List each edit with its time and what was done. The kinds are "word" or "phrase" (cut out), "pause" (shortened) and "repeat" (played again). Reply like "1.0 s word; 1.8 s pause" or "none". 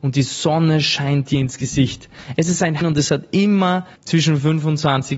2.8 s phrase; 4.0 s pause